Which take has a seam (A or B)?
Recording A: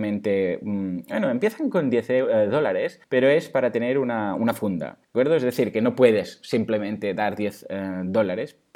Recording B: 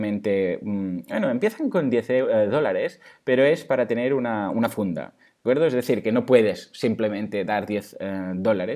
A